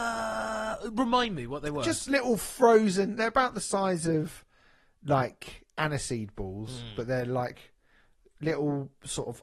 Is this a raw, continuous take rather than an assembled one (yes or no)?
yes